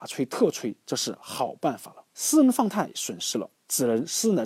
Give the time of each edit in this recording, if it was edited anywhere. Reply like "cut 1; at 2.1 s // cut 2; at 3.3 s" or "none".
cut 1; at 2.1 s // cut 2; at 3.6 s